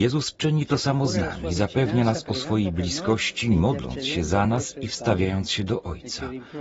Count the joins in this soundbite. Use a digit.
0